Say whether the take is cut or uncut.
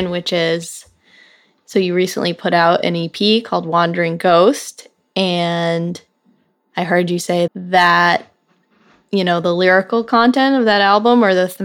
cut